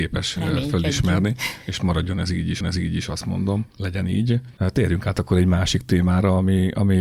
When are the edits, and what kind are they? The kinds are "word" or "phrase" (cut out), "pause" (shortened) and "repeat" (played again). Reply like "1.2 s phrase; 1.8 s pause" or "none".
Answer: 2.6 s repeat; 3.7 s pause; 4.6 s pause